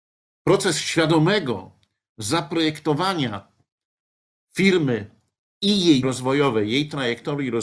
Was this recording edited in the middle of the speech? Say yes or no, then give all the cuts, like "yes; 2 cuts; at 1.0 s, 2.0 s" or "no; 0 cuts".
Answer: yes; 1 cut; at 6.0 s